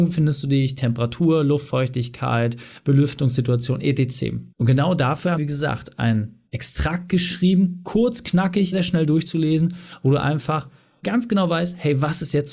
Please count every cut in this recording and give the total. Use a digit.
5